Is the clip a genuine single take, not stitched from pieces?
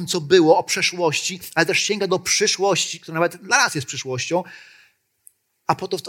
yes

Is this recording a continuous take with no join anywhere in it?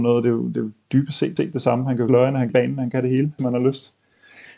no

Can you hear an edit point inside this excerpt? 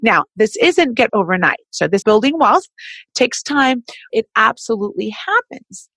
yes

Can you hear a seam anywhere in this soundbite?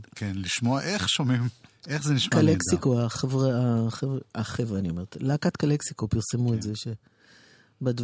yes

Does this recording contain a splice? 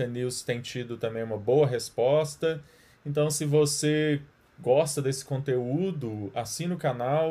no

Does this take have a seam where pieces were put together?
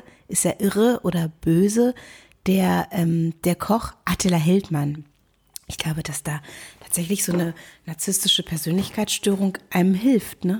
no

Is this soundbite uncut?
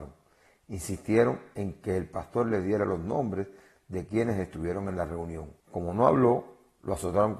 no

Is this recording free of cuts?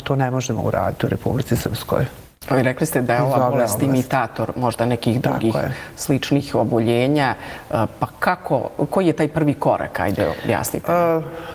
yes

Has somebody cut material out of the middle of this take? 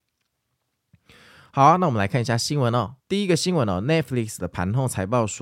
yes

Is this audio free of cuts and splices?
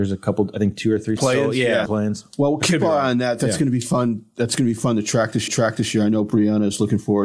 no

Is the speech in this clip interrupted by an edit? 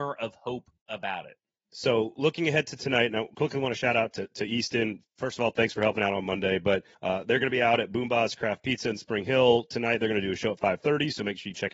yes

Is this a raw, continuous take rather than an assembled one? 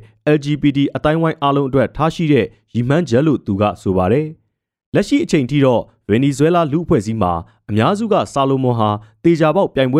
yes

